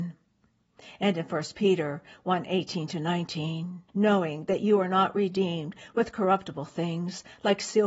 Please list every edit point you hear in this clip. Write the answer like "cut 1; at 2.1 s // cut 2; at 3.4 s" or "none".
cut 1; at 3.9 s